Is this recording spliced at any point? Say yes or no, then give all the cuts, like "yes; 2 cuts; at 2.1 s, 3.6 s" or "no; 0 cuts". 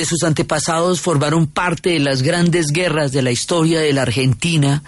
no; 0 cuts